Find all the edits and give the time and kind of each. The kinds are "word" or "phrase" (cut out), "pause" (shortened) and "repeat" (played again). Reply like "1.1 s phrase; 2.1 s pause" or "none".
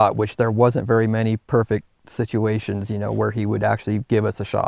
1.4 s pause